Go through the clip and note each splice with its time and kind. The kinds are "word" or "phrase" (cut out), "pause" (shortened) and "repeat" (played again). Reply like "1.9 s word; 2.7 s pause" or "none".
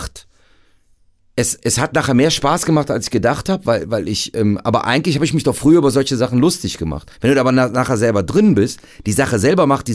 7.1 s pause